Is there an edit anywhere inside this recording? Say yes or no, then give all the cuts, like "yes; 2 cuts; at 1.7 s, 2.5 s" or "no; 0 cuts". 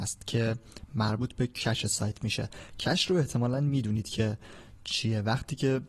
no; 0 cuts